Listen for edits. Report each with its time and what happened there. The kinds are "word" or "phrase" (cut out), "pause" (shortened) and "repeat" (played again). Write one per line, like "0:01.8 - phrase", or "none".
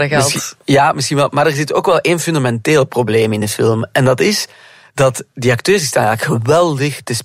none